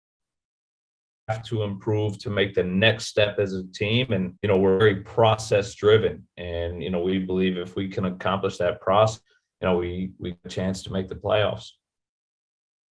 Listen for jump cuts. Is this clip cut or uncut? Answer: cut